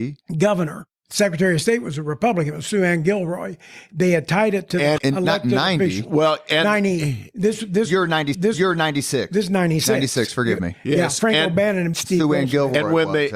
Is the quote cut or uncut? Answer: cut